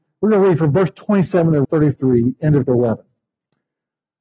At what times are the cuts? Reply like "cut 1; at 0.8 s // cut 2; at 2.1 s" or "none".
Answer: cut 1; at 1.6 s // cut 2; at 2.7 s